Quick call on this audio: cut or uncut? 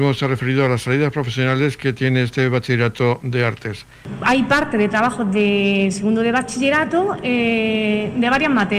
uncut